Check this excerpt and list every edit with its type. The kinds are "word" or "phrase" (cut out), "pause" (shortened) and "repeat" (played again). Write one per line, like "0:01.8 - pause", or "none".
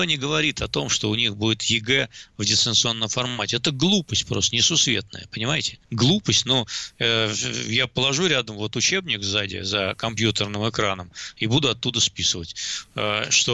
0:05.8 - pause